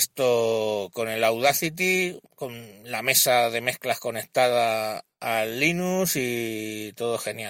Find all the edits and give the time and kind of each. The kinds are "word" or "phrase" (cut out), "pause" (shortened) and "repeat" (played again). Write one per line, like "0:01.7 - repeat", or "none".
0:02.3 - pause